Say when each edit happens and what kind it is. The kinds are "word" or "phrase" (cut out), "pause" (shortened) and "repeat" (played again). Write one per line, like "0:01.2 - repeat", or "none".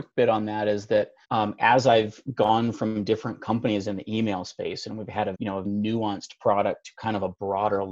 0:01.2 - pause
0:05.3 - word
0:05.6 - word